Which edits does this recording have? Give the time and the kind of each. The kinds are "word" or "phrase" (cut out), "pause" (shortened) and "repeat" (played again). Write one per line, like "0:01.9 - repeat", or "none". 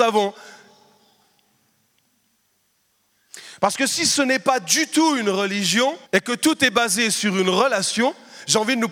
0:06.1 - pause